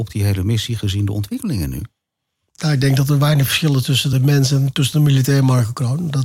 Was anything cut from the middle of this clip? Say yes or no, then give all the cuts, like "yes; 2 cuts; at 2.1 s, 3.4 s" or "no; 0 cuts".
no; 0 cuts